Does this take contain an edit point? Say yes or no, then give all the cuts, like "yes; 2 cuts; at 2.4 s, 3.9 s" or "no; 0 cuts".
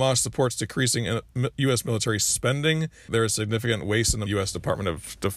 yes; 2 cuts; at 3.1 s, 4.3 s